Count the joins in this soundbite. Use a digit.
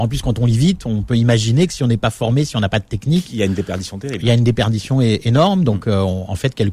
0